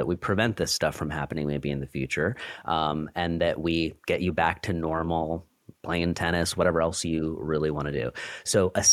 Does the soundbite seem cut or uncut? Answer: uncut